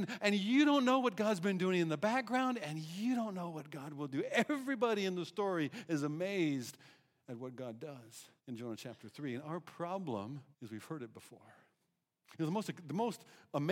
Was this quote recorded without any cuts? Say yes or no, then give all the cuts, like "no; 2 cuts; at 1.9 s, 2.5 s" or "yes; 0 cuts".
no; 2 cuts; at 8.4 s, 10.5 s